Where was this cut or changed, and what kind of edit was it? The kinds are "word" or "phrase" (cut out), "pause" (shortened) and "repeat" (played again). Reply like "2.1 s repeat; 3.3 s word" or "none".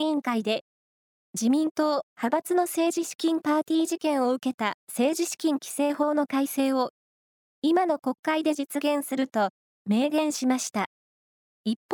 none